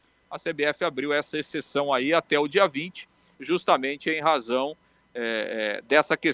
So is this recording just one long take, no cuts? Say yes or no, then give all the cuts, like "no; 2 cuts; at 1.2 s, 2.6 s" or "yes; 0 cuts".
yes; 0 cuts